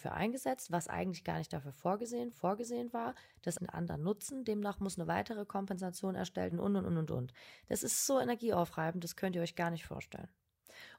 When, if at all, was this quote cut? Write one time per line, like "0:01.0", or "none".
0:02.3
0:03.6
0:06.5